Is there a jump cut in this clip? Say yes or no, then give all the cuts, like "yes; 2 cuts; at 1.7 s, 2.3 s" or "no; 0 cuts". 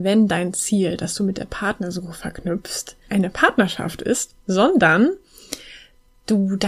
yes; 1 cut; at 3.1 s